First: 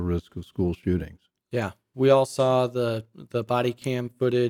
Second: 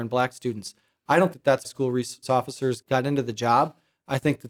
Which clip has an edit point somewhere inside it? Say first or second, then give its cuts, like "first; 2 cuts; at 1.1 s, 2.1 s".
second; 4 cuts; at 1.3 s, 1.6 s, 2.2 s, 2.8 s